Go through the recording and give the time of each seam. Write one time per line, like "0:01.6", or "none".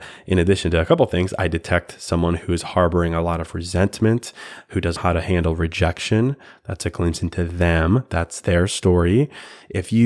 0:05.0